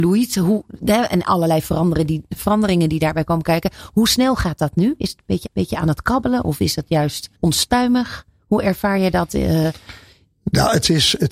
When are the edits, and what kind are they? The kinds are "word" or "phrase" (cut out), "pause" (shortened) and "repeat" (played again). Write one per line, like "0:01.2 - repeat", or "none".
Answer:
0:05.4 - repeat
0:07.3 - pause

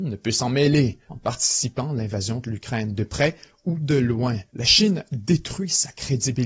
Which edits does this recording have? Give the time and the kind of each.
0:01.0 - pause
0:04.5 - pause

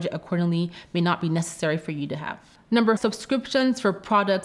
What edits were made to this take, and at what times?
0:03.0 - word

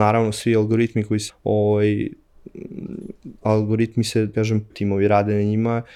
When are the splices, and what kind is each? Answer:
0:01.3 - word
0:03.4 - word
0:04.3 - word
0:04.7 - word

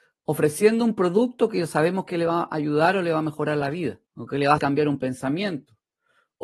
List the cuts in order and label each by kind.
0:04.1 - pause
0:04.6 - word

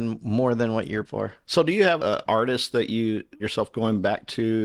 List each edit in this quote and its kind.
0:01.0 - word
0:02.0 - word
0:03.4 - word

